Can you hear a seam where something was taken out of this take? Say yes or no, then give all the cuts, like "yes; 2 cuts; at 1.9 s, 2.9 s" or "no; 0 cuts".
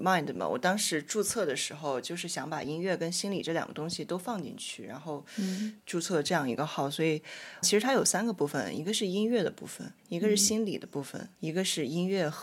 yes; 4 cuts; at 5.8 s, 7.6 s, 10.0 s, 11.3 s